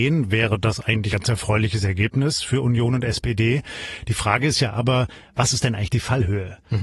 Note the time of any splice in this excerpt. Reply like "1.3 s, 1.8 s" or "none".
1.1 s